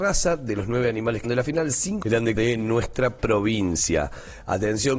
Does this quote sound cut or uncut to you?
cut